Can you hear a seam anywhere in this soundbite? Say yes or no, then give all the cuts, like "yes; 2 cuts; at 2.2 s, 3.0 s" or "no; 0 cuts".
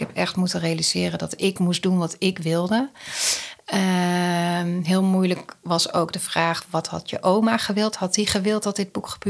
no; 0 cuts